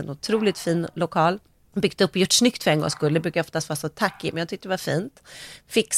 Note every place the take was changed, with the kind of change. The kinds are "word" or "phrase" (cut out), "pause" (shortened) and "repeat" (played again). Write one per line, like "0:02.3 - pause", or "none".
none